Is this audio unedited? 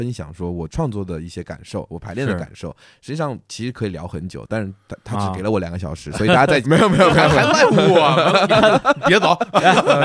no; 1 cut; at 6.6 s

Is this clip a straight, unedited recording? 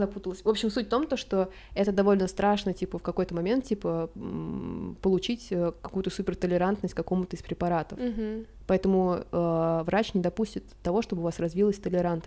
yes; 0 cuts

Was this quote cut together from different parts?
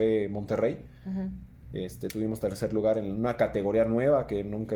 no; 0 cuts

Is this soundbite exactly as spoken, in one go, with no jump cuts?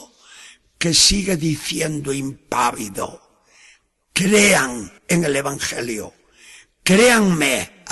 no; 1 cut; at 5.0 s

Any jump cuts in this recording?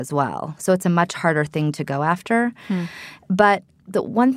no; 0 cuts

